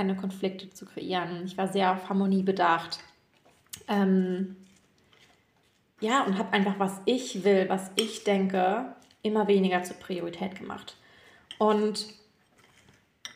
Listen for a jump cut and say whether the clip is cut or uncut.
uncut